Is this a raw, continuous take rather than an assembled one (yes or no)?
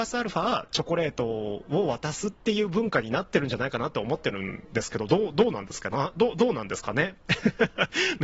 no